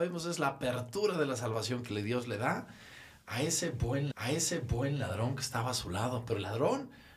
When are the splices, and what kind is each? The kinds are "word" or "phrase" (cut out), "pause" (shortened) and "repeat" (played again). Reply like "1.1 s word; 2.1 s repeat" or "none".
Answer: 4.1 s repeat